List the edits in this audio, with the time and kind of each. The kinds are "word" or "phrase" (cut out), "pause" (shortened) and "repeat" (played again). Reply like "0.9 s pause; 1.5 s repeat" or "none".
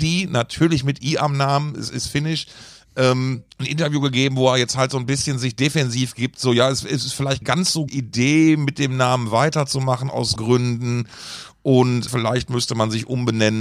3.5 s pause; 7.4 s word; 7.9 s word; 10.4 s word; 12.1 s word